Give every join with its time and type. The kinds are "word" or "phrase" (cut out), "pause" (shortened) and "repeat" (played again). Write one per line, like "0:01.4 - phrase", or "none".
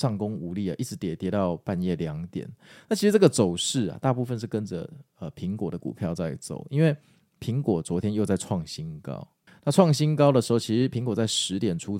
0:09.5 - word